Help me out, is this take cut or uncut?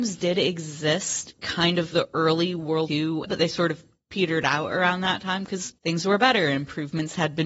cut